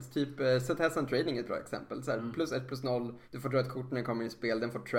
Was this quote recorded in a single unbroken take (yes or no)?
no